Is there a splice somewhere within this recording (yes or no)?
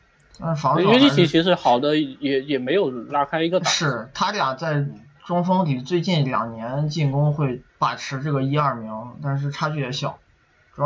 yes